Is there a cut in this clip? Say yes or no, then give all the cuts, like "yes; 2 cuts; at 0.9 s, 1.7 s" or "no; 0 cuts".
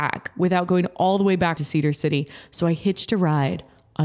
yes; 1 cut; at 1.6 s